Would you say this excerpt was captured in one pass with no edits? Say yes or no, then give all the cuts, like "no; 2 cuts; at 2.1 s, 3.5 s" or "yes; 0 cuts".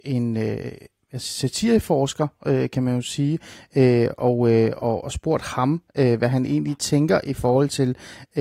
yes; 0 cuts